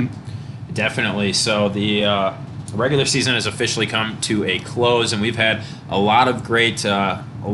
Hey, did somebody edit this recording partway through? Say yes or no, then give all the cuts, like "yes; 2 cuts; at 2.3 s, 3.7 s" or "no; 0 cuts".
no; 0 cuts